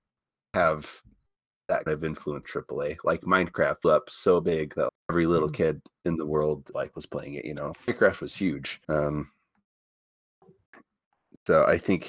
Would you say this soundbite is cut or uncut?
cut